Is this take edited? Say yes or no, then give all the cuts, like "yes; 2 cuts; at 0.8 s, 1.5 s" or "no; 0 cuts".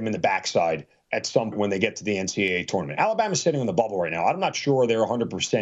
yes; 1 cut; at 1.5 s